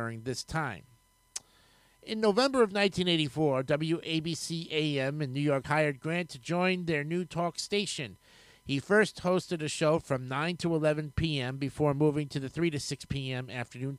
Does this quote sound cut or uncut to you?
cut